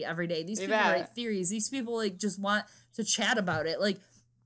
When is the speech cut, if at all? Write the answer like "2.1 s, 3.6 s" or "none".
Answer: none